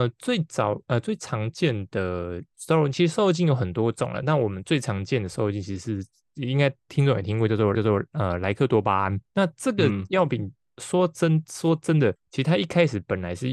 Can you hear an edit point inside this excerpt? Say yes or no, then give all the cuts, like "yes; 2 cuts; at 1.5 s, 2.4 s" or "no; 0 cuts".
yes; 2 cuts; at 2.5 s, 7.7 s